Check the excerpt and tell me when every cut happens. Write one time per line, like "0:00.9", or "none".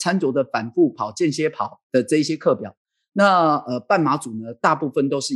none